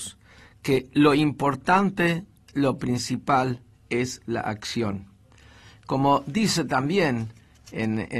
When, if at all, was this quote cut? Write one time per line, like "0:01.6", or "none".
none